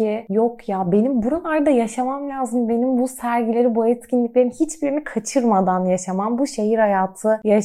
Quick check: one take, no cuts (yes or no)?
yes